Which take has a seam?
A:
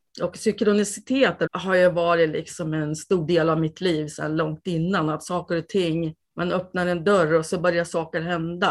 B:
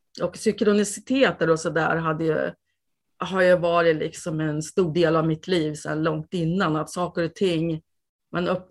A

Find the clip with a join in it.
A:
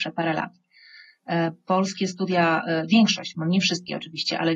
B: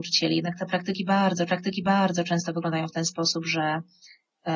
B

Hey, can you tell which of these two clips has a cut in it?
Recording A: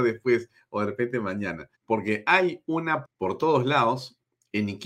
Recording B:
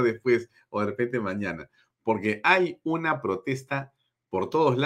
A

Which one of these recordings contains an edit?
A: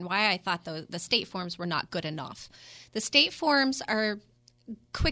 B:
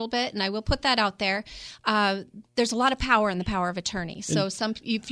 B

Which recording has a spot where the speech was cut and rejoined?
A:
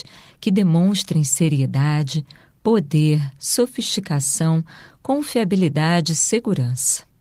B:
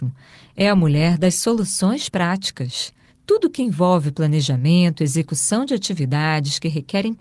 B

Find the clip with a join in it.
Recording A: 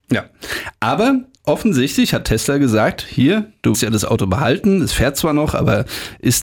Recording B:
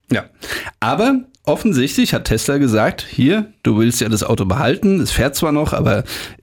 A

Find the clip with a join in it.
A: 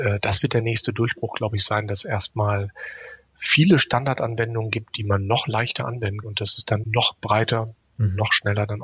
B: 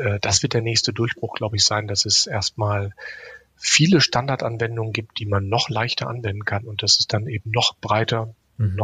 A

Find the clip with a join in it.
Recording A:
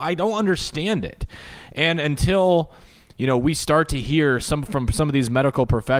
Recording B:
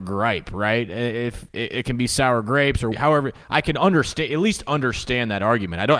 B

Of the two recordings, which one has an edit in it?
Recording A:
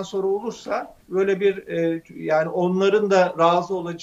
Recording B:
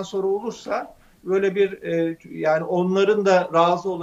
A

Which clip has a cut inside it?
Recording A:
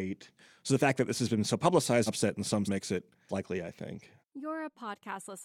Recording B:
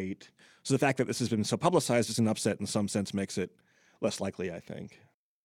A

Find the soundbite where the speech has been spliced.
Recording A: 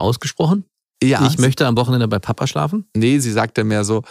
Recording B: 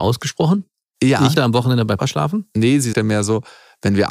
B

